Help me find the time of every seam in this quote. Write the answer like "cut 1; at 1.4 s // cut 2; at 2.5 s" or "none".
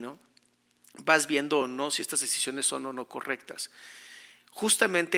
none